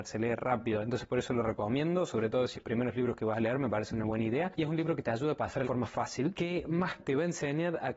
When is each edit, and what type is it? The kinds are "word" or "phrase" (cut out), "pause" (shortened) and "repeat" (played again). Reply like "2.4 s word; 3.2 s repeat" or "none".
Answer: 2.5 s phrase; 5.6 s phrase; 7.0 s phrase